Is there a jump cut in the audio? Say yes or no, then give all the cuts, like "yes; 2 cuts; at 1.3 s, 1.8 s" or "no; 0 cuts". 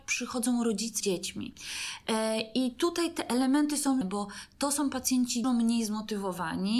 yes; 3 cuts; at 1.0 s, 4.0 s, 5.4 s